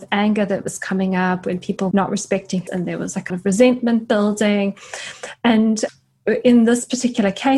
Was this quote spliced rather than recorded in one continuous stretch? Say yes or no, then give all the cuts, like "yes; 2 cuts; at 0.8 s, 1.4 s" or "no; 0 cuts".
yes; 3 cuts; at 1.9 s, 2.7 s, 3.3 s